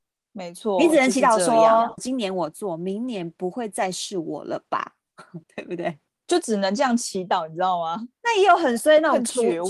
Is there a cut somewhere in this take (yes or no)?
yes